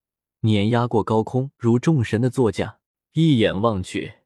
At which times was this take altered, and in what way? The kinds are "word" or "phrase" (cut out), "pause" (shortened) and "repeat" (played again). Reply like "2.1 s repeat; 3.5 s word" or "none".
1.5 s pause; 2.8 s pause